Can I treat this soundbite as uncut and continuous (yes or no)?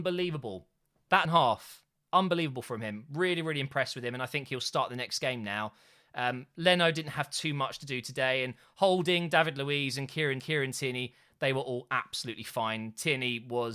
no